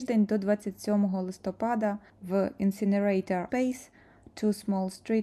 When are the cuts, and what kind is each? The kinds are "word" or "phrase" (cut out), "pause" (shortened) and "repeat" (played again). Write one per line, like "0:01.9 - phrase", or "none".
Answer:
0:03.5 - word